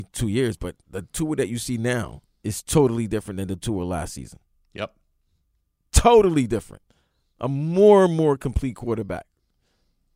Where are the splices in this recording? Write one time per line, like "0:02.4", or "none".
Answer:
0:04.5